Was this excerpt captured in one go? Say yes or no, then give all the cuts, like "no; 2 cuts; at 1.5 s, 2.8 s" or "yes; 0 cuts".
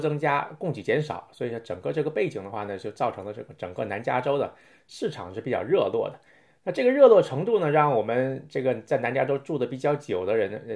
yes; 0 cuts